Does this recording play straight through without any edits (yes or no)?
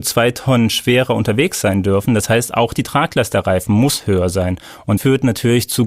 no